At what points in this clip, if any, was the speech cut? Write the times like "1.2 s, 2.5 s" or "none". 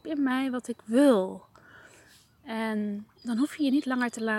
3.2 s